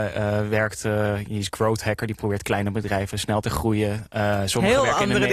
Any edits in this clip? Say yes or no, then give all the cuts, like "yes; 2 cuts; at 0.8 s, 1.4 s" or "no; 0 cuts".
yes; 1 cut; at 3.4 s